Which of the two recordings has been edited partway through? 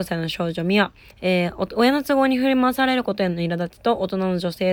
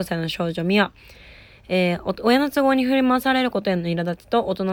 first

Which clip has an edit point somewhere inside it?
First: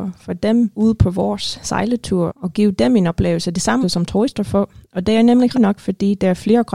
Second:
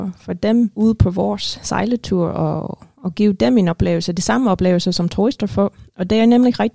first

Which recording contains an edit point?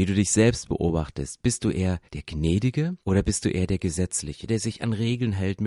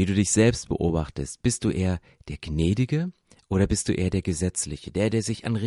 first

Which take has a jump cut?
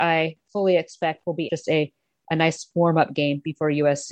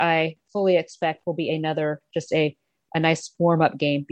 first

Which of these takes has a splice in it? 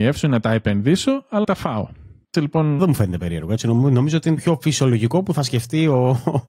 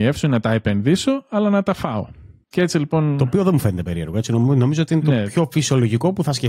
first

